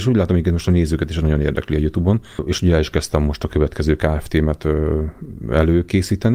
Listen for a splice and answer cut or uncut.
uncut